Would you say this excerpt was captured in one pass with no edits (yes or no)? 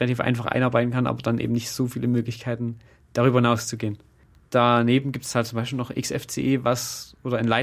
yes